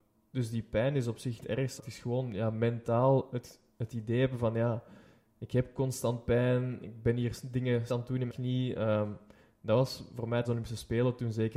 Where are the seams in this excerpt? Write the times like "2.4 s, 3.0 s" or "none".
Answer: 1.4 s, 1.8 s, 7.9 s, 8.3 s, 10.4 s